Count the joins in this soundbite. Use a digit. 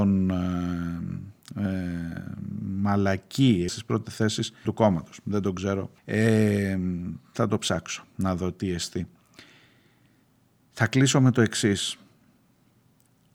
3